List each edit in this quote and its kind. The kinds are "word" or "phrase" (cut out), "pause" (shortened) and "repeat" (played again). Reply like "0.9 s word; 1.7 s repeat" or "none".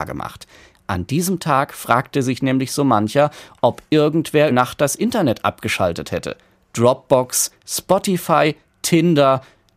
4.5 s word